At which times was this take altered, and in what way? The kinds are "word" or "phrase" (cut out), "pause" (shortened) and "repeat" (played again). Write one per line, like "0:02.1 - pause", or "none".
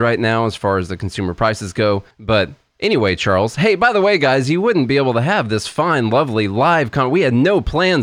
0:02.1 - pause

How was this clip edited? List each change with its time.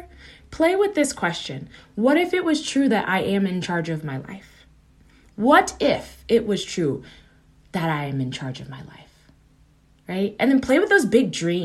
none

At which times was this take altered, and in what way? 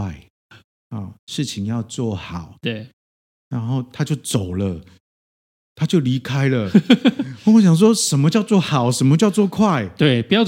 none

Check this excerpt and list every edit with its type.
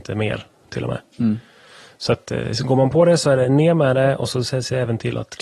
none

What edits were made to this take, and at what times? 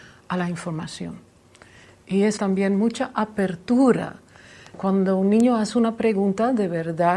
0:02.4 - word

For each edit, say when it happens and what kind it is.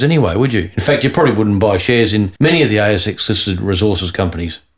0:02.4 - pause

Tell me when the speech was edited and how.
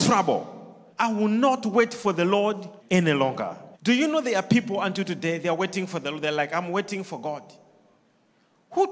0:00.9 - pause
0:02.8 - pause
0:03.7 - pause

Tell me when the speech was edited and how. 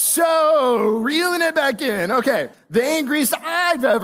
0:02.5 - pause

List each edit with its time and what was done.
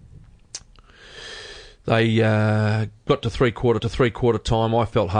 0:03.0 - pause
0:03.8 - repeat

